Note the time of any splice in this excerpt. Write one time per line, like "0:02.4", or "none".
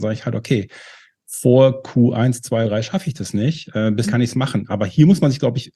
0:02.6
0:04.0